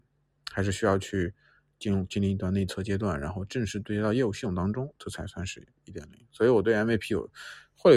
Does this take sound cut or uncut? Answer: uncut